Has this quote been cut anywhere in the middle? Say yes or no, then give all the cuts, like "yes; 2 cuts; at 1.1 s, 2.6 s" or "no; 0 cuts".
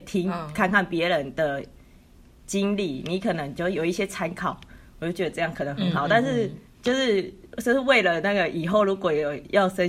yes; 1 cut; at 6.7 s